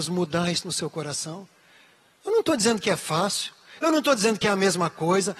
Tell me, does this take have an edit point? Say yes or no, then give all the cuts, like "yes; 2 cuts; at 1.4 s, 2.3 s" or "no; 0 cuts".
no; 0 cuts